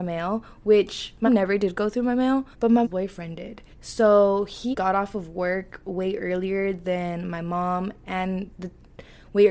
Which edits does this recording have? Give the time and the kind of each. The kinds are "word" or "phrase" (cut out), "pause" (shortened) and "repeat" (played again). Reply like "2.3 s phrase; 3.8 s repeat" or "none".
1.3 s word; 2.5 s pause; 2.8 s word; 3.7 s pause; 4.7 s word; 8.5 s pause